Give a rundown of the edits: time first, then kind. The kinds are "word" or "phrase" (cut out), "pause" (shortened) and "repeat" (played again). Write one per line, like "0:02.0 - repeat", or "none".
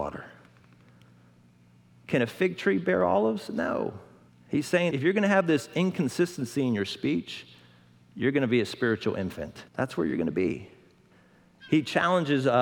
0:04.3 - pause
0:04.9 - word
0:09.7 - pause